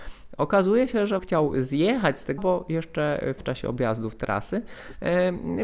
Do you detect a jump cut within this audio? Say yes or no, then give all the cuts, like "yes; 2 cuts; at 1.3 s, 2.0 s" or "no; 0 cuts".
yes; 3 cuts; at 1.2 s, 2.4 s, 3.4 s